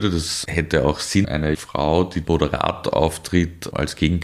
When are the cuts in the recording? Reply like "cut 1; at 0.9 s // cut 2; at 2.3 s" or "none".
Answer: cut 1; at 1.2 s // cut 2; at 1.5 s // cut 3; at 2.2 s